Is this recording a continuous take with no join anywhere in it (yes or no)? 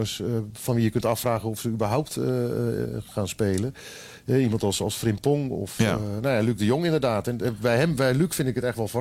no